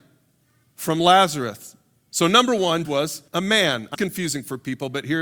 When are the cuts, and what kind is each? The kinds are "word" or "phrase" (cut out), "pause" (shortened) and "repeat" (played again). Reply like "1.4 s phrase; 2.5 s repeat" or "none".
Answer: 2.8 s word; 3.3 s pause; 3.9 s phrase